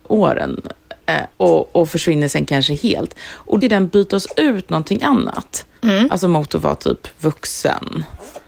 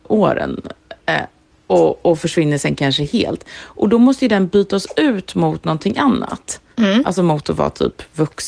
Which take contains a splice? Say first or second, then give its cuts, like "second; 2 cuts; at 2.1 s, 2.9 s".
first; 3 cuts; at 1.3 s, 3.6 s, 4.7 s